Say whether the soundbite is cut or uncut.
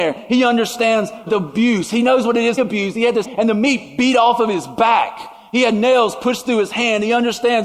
cut